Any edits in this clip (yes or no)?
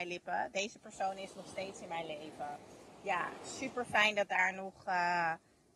no